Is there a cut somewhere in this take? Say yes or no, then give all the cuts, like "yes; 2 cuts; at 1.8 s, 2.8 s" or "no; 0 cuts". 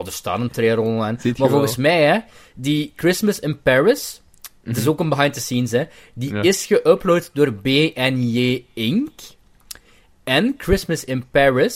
no; 0 cuts